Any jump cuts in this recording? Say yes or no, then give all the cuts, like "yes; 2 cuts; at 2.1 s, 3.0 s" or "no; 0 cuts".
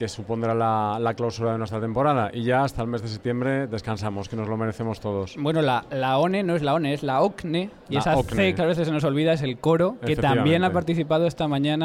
yes; 1 cut; at 8.6 s